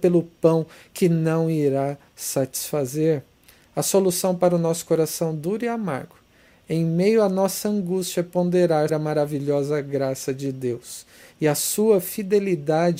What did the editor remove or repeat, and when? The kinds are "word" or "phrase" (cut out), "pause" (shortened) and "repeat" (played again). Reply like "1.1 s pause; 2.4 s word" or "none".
8.9 s word